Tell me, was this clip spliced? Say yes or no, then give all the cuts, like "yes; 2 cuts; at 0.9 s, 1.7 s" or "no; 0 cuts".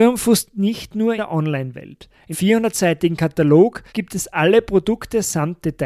yes; 3 cuts; at 1.2 s, 2.3 s, 3.9 s